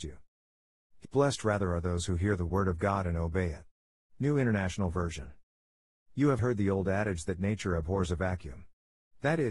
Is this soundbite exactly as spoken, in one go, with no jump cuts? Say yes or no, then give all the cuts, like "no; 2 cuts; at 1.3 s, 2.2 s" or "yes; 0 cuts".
no; 2 cuts; at 1.0 s, 6.4 s